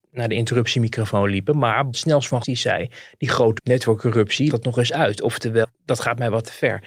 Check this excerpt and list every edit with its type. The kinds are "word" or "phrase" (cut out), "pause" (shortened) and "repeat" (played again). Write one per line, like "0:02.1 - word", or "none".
0:01.9 - word
0:02.4 - word
0:03.6 - word
0:04.5 - word
0:05.6 - word